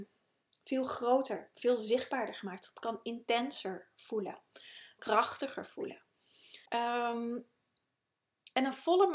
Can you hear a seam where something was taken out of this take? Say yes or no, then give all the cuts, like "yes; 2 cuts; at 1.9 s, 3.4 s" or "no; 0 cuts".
yes; 2 cuts; at 5.0 s, 6.7 s